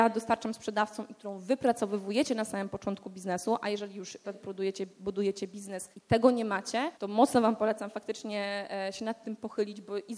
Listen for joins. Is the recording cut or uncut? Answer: cut